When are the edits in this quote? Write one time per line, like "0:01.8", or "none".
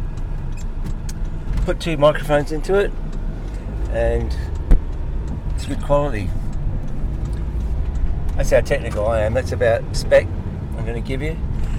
0:01.7
0:05.7
0:09.9